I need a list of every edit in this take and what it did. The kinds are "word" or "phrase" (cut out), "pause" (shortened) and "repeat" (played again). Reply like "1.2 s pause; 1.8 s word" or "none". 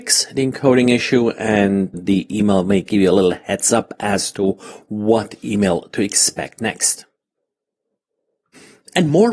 1.9 s word